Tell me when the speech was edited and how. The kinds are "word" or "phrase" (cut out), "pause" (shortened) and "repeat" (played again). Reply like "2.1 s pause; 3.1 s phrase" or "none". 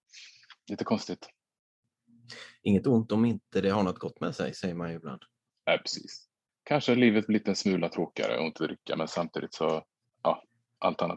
none